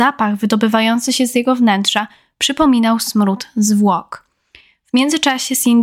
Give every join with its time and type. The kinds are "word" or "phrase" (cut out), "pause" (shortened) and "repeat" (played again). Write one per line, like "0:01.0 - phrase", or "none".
none